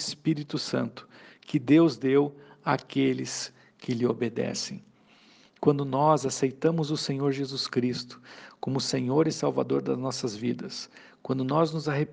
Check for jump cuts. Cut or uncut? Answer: uncut